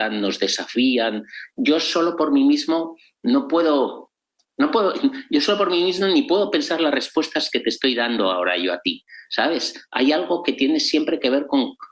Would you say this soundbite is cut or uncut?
uncut